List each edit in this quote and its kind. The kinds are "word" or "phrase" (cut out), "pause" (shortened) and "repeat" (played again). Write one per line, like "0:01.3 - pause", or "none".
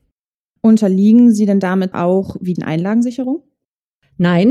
0:01.9 - word
0:02.6 - phrase